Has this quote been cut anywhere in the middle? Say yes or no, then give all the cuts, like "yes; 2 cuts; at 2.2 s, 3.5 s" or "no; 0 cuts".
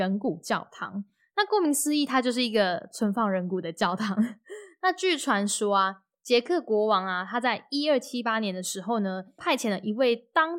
no; 0 cuts